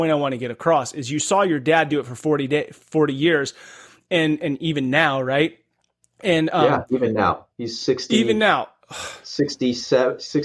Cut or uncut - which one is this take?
uncut